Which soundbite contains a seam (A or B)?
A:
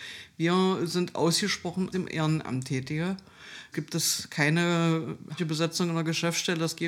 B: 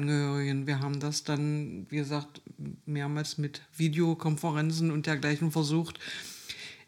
A